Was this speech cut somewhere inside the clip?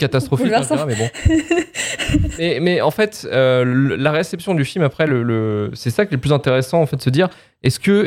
no; 0 cuts

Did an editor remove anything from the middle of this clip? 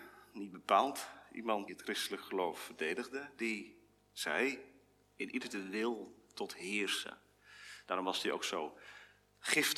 yes; 2 cuts; at 1.7 s, 5.4 s

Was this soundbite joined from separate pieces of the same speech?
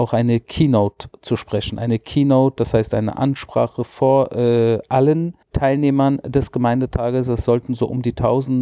yes; 1 cut; at 5.4 s

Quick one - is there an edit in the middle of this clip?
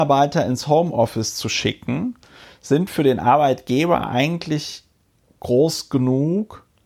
no; 0 cuts

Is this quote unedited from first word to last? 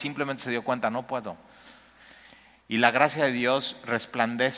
yes; 0 cuts

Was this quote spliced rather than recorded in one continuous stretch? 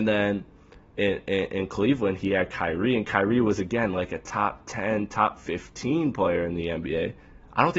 no; 0 cuts

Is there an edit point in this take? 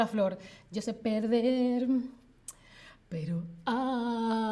no; 0 cuts

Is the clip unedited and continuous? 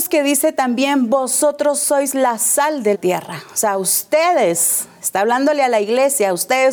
no; 1 cut; at 2.9 s

